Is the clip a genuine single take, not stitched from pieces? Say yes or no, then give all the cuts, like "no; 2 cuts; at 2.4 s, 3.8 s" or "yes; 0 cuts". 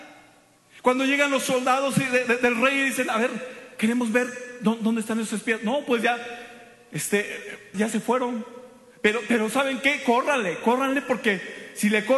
no; 1 cut; at 7.7 s